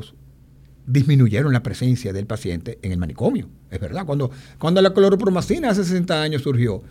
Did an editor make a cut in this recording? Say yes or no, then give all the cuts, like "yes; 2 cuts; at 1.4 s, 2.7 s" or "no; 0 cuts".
no; 0 cuts